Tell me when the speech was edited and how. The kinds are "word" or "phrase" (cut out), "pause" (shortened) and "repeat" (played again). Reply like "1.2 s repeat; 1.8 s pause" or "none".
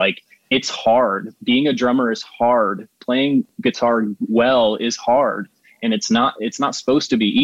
none

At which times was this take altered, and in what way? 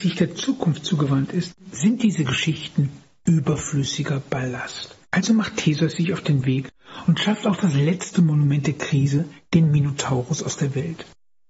5.0 s pause

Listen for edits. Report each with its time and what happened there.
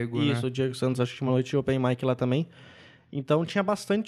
none

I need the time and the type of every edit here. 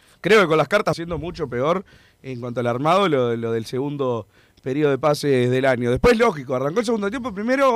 0.9 s phrase

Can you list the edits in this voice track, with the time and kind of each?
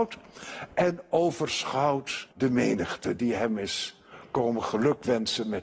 2.3 s pause

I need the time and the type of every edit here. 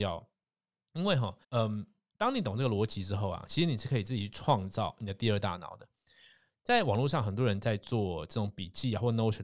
1.4 s pause

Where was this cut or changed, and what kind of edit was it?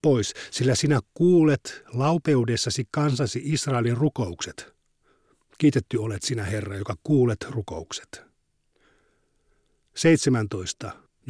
none

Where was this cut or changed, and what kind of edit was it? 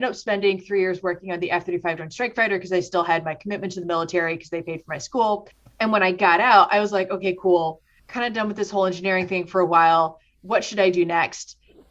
none

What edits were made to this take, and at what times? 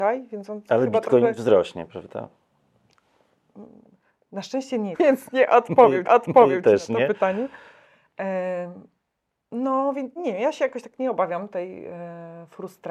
4.9 s phrase; 6.0 s repeat; 10.2 s word

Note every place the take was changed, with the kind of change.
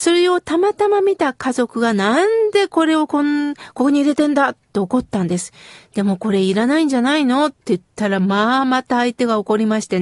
none

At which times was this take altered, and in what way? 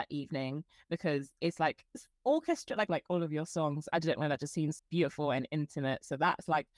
2.9 s phrase; 4.8 s word

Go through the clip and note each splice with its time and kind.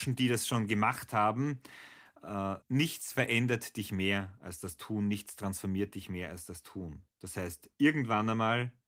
2.6 s pause; 7.1 s pause; 7.7 s pause

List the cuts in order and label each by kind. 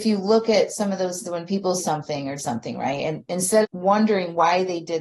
1.2 s word; 1.8 s word; 2.4 s word; 3.6 s word

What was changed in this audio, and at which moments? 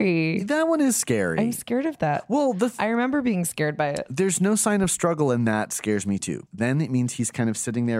6.5 s word

